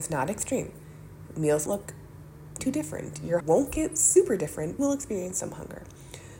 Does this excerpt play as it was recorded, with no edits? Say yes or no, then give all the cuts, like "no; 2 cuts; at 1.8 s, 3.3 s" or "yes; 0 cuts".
no; 4 cuts; at 1.7 s, 2.6 s, 3.4 s, 4.8 s